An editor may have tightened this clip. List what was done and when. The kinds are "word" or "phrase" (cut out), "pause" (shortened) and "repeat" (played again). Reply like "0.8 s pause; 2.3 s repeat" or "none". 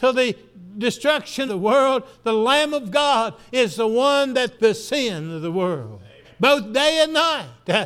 1.5 s word; 4.6 s phrase; 6.2 s pause